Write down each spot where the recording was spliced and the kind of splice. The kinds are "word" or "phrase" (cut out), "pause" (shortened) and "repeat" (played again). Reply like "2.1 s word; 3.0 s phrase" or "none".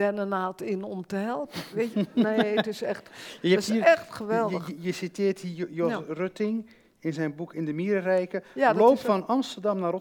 none